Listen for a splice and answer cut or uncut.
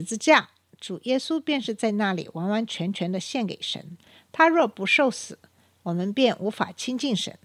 uncut